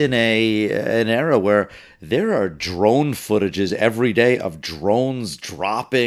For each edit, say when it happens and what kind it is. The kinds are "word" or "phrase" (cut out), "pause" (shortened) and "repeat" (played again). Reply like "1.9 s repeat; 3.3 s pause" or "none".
none